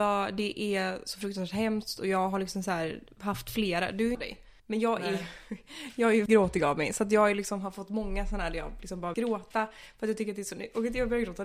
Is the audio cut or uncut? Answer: cut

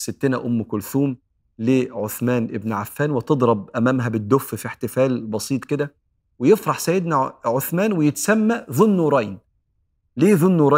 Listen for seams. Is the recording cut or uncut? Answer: uncut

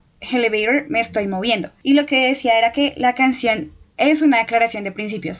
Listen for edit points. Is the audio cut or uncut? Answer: uncut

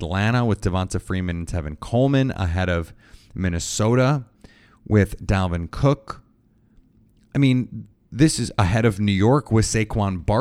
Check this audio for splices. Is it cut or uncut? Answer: uncut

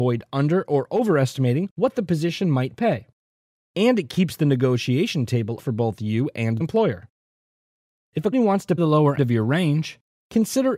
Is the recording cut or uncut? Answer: cut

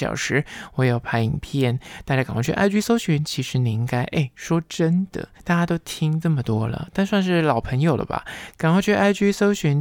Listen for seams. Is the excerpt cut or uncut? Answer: cut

